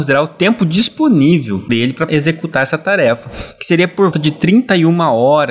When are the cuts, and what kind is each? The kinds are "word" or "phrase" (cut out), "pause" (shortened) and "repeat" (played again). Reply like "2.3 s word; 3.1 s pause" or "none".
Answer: 1.7 s word; 2.1 s word; 4.1 s word